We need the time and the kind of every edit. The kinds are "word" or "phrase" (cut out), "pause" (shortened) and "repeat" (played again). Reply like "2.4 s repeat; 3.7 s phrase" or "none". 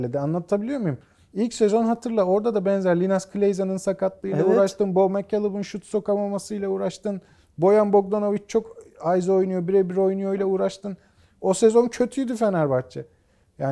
none